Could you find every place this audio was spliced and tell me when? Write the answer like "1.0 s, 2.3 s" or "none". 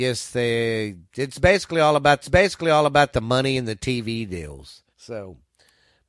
2.2 s, 4.9 s